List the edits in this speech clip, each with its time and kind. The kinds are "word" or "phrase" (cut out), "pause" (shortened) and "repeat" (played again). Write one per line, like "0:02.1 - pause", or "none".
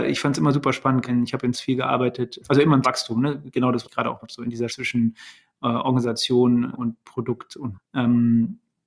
0:01.1 - word
0:01.5 - word
0:02.4 - word
0:02.8 - word
0:03.8 - word
0:04.2 - word
0:04.7 - word
0:06.7 - word
0:07.7 - word